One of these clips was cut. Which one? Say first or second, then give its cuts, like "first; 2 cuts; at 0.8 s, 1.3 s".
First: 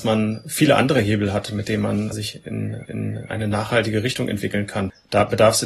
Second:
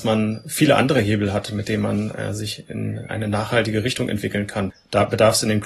first; 2 cuts; at 2.1 s, 2.8 s